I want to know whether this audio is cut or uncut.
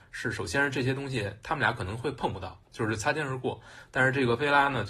cut